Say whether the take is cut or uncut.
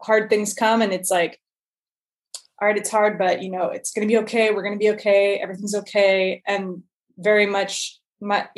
uncut